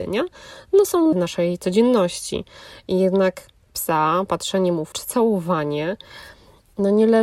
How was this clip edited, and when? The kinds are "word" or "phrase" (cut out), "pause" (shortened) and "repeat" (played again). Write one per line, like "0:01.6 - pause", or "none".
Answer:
0:01.1 - word
0:03.6 - word
0:04.9 - word